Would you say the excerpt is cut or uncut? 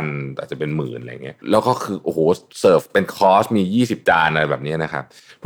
cut